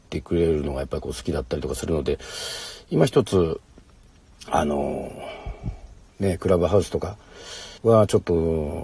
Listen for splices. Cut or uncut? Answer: cut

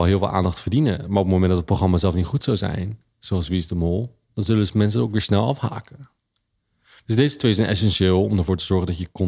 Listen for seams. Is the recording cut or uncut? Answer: uncut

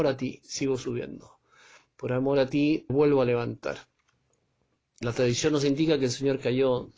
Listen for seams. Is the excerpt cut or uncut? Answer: cut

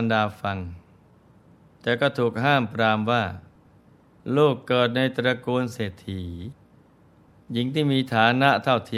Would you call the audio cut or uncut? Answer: uncut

